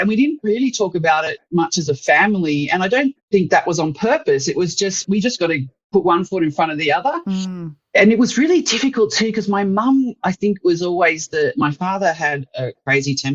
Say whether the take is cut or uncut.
cut